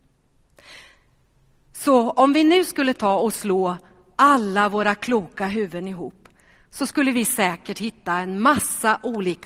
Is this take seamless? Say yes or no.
yes